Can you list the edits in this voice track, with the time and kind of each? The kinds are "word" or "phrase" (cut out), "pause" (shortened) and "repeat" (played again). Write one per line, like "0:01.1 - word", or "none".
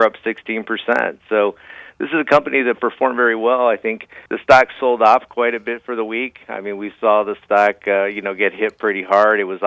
0:04.3 - pause